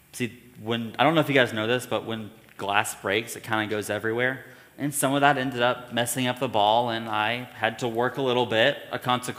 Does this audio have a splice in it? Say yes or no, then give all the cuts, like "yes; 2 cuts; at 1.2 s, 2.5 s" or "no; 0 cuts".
no; 0 cuts